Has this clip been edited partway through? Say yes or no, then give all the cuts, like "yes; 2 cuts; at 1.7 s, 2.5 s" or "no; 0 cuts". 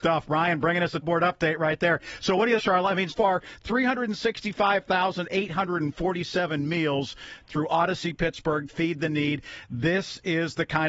yes; 5 cuts; at 1.0 s, 2.6 s, 3.1 s, 7.4 s, 8.7 s